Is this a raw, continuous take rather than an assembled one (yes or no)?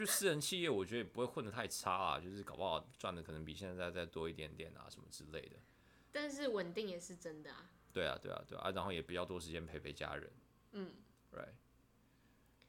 yes